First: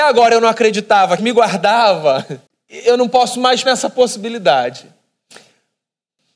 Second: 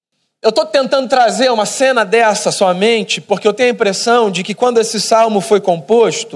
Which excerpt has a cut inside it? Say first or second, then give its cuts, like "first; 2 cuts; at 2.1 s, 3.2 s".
first; 3 cuts; at 1.2 s, 2.5 s, 3.7 s